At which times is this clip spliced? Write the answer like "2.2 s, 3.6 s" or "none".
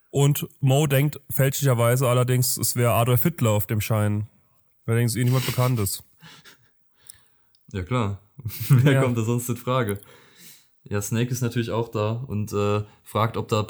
none